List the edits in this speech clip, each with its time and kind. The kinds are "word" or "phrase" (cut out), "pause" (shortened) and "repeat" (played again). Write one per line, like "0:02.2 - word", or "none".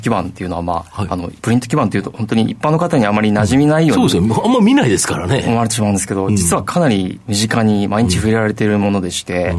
0:01.4 - pause